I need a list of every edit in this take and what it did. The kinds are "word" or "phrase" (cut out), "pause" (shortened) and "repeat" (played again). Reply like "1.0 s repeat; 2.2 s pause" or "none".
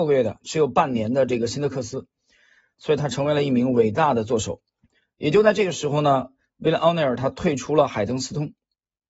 none